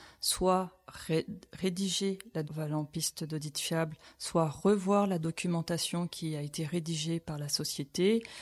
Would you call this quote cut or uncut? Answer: cut